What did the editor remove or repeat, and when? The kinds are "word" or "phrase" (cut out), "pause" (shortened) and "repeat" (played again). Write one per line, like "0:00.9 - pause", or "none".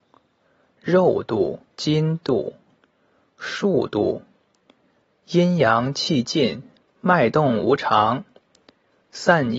0:01.7 - pause
0:06.8 - phrase